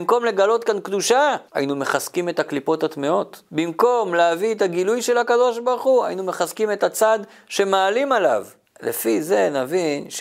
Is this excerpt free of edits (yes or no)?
no